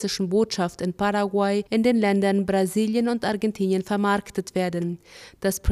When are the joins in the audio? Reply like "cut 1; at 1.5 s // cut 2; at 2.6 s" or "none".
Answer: cut 1; at 1.7 s